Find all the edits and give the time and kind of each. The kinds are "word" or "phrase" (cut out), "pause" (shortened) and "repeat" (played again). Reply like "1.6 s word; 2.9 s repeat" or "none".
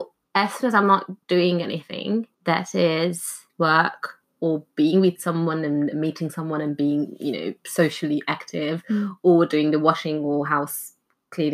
1.2 s pause; 2.3 s pause; 3.5 s pause